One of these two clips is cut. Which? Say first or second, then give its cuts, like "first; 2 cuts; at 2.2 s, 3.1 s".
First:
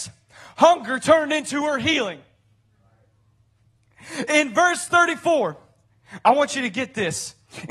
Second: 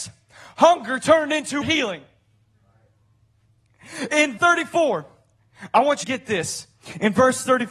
second; 3 cuts; at 1.6 s, 4.4 s, 6.0 s